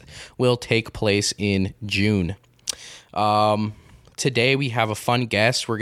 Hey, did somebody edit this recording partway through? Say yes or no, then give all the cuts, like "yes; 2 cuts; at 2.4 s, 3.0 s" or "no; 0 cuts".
no; 0 cuts